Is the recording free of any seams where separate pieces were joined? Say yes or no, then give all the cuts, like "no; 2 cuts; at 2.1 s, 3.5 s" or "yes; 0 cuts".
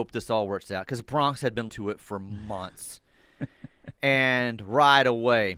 no; 1 cut; at 1.7 s